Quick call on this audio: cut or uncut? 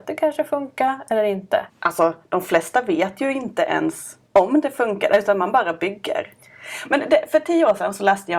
cut